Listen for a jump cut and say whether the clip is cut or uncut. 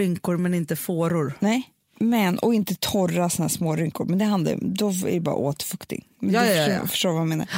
uncut